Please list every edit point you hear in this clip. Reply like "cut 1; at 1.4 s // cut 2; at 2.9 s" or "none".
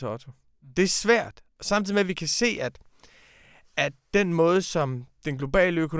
none